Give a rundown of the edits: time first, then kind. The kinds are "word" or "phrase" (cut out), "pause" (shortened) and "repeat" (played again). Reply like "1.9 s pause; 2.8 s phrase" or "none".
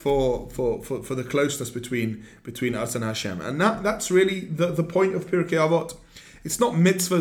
none